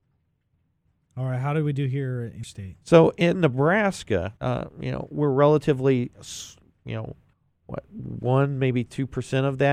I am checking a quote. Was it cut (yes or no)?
yes